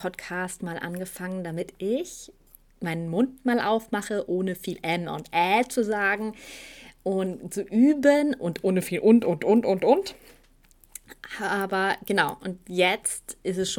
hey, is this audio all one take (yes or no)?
yes